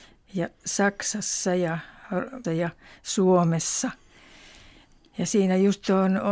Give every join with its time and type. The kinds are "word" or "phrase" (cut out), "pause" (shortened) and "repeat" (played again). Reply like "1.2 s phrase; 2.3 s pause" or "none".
2.4 s word